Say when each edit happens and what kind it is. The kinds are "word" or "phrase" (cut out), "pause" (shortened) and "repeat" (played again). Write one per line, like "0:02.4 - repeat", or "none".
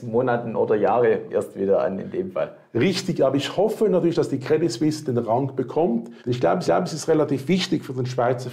0:01.3 - word
0:06.2 - pause
0:06.7 - repeat